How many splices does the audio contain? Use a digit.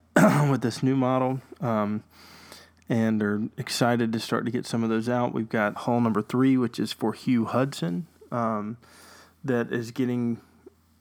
1